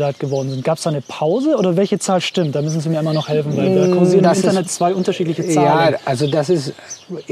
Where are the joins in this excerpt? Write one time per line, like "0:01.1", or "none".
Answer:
none